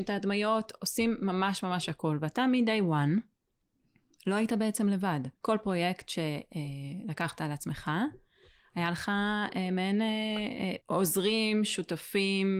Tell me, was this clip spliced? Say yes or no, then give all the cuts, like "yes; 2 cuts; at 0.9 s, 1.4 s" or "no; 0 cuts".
yes; 2 cuts; at 5.3 s, 10.8 s